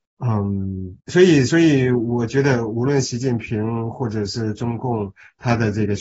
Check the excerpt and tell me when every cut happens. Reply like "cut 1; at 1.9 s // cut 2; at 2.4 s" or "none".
cut 1; at 1.0 s